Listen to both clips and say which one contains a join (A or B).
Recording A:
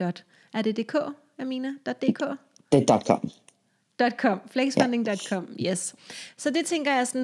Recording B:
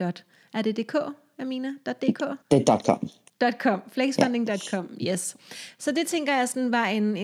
B